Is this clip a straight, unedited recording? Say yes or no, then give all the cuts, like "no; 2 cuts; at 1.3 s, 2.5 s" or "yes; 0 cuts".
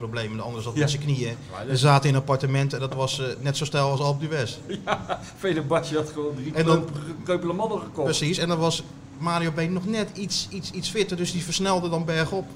yes; 0 cuts